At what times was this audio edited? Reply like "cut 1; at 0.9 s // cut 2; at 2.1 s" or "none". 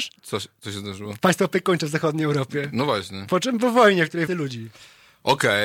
cut 1; at 4.3 s